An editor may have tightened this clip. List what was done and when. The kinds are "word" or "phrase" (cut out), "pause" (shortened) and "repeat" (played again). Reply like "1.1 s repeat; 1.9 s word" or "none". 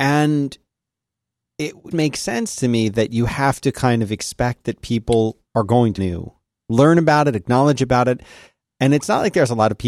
1.9 s word; 5.5 s pause; 6.0 s word

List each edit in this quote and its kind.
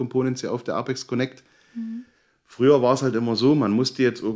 none

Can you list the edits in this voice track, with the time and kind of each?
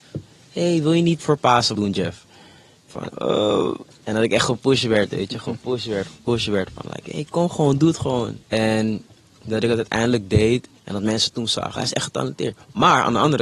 1.2 s word; 1.7 s word; 2.9 s phrase; 8.4 s pause; 10.8 s pause; 11.8 s phrase

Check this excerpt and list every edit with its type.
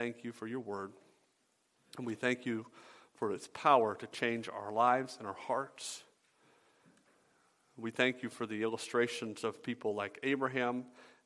none

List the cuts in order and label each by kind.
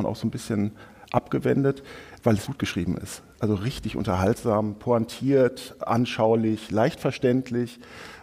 2.4 s word

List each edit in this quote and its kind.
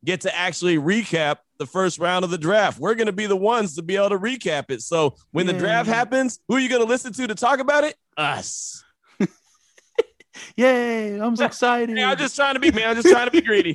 6.4 s pause; 8.0 s pause; 11.4 s word; 12.7 s word

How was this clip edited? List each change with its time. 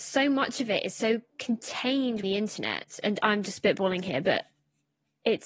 2.2 s word

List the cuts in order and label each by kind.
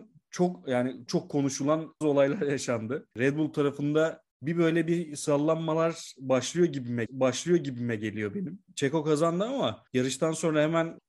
1.1 s word; 2.0 s word; 3.1 s pause; 4.3 s pause; 7.1 s repeat; 8.7 s pause; 9.9 s pause

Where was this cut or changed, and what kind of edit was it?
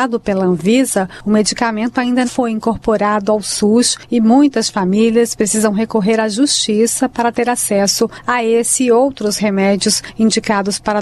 2.2 s word

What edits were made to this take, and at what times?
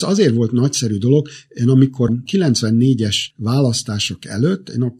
2.1 s word

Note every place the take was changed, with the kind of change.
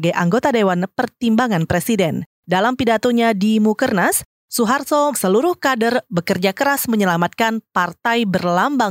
5.1 s word

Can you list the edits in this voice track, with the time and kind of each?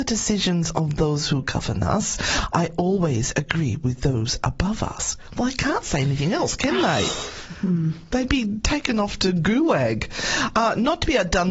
none

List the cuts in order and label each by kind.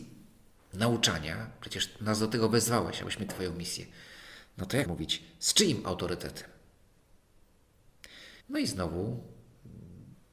3.3 s word; 4.9 s word; 8.4 s pause

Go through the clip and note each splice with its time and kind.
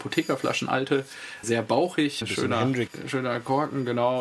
1.4 s word; 2.2 s word; 2.9 s word

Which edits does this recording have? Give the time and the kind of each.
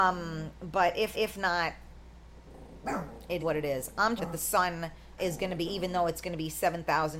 1.1 s repeat; 3.4 s word; 4.2 s phrase; 5.2 s word; 5.7 s word

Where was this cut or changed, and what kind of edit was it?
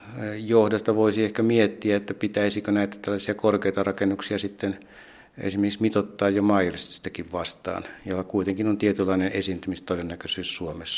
none

